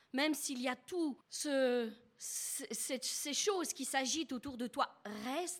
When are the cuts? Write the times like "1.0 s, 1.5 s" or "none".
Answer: 1.2 s